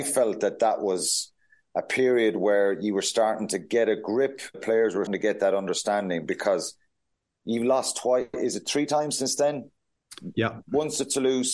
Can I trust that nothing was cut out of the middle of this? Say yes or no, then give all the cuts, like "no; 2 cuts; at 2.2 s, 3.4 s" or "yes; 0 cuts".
no; 2 cuts; at 4.5 s, 5.1 s